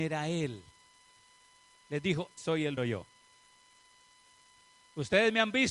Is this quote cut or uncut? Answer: cut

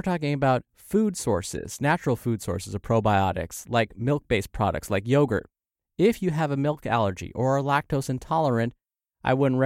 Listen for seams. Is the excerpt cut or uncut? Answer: uncut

